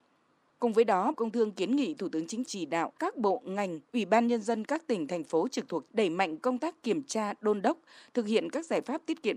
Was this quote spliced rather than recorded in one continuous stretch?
yes; 5 cuts; at 1.1 s, 2.5 s, 3.0 s, 3.8 s, 5.9 s

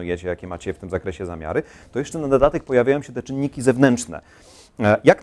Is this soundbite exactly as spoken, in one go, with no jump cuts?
yes; 0 cuts

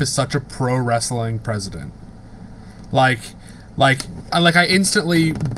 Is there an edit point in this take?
yes; 1 cut; at 4.3 s

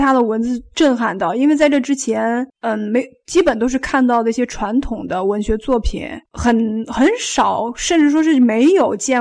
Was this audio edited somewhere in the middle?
yes; 2 cuts; at 2.5 s, 6.3 s

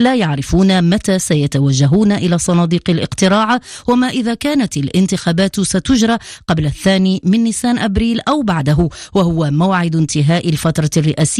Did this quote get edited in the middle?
no; 0 cuts

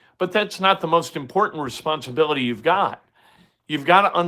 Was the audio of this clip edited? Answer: no; 0 cuts

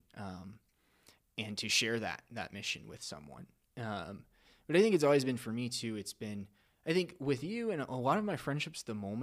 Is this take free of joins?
yes; 0 cuts

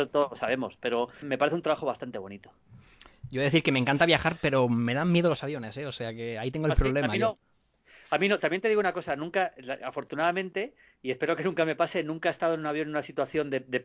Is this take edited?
yes; 1 cut; at 1.2 s

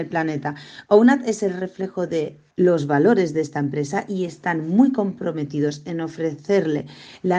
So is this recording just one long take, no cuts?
no; 1 cut; at 2.5 s

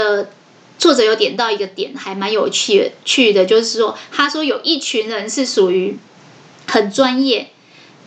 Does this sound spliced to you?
no; 0 cuts

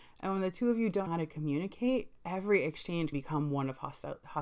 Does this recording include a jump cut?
yes; 2 cuts; at 1.1 s, 3.1 s

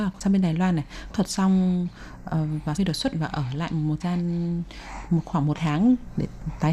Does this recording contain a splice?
yes; 5 cuts; at 1.1 s, 2.8 s, 3.1 s, 4.0 s, 5.5 s

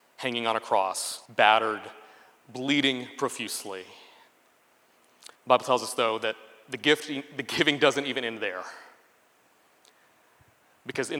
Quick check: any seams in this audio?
yes; 2 cuts; at 1.3 s, 5.4 s

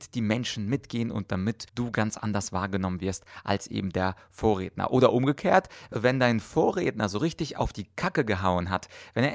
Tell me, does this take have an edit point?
yes; 1 cut; at 1.7 s

